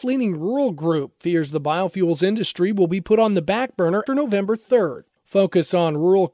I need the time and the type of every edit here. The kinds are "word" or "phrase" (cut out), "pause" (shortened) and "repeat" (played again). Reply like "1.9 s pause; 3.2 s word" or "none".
4.1 s word